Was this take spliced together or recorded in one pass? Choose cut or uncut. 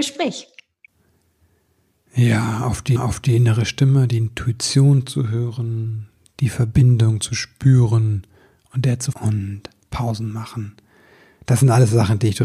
cut